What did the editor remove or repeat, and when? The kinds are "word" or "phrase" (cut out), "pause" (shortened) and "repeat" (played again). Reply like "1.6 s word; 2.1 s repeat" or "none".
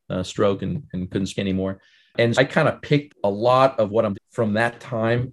1.4 s word; 2.3 s word; 3.1 s word; 4.1 s word